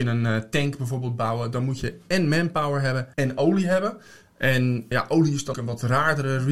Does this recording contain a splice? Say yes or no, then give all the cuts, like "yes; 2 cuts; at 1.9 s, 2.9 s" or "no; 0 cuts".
yes; 3 cuts; at 3.1 s, 4.9 s, 5.5 s